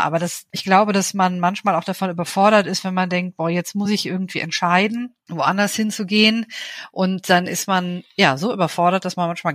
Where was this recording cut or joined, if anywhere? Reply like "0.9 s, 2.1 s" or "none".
none